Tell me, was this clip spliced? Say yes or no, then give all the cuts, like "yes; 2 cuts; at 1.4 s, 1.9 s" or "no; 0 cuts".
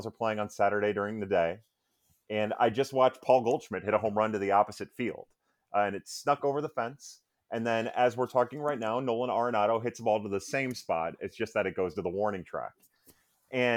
no; 0 cuts